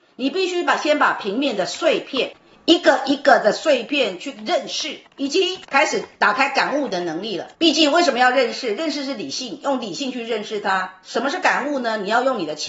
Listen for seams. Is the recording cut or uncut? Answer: cut